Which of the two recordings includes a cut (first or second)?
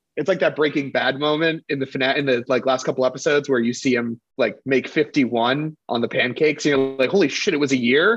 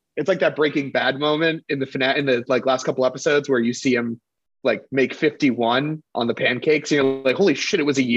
first